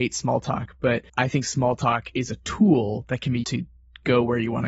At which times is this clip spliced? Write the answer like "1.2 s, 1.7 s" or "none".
1.1 s, 3.4 s